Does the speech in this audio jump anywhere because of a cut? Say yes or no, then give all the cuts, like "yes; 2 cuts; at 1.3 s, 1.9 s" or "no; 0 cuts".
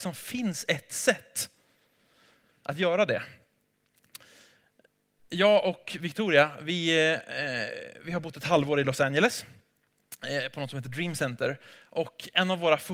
no; 0 cuts